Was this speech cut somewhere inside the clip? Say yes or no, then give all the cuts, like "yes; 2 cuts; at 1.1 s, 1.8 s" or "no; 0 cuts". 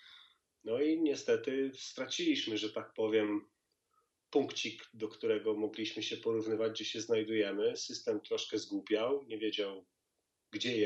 no; 0 cuts